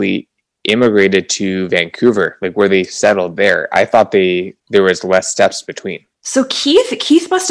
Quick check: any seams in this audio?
yes; 2 cuts; at 4.6 s, 6.1 s

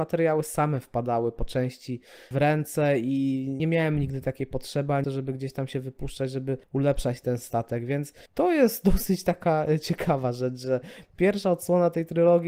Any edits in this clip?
yes; 5 cuts; at 2.3 s, 3.6 s, 5.0 s, 6.6 s, 8.3 s

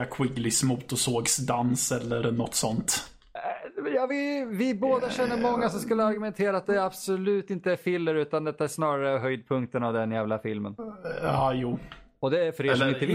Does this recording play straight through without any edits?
yes; 0 cuts

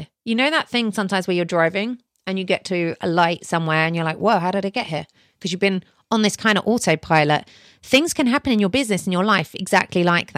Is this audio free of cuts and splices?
yes; 0 cuts

